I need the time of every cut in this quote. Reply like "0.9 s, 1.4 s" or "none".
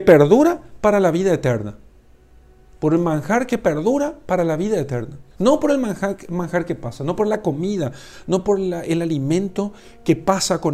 5.3 s